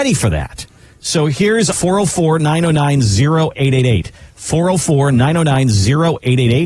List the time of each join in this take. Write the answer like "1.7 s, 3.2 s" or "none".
1.7 s